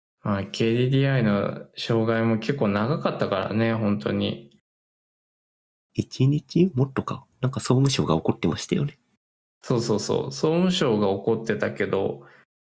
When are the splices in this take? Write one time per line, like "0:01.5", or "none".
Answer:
none